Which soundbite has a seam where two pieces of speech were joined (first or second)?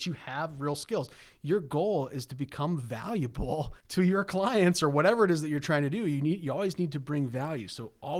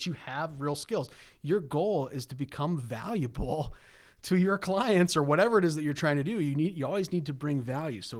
first